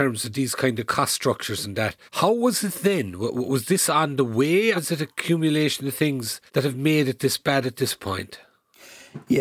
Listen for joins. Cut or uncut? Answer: cut